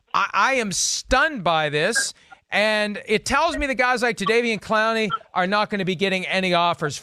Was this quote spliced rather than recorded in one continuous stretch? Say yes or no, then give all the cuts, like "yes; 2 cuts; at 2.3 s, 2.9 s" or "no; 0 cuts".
no; 0 cuts